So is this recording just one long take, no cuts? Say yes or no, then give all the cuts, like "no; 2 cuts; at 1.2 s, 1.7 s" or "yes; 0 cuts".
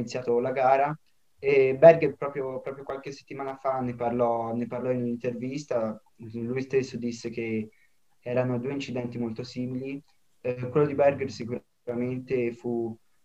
yes; 0 cuts